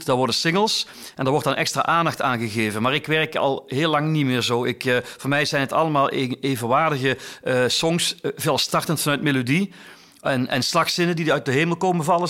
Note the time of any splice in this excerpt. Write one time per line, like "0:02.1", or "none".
none